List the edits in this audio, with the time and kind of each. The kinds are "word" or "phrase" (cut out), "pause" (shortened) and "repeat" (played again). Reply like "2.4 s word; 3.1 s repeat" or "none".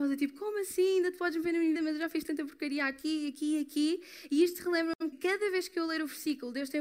1.8 s word; 5.1 s word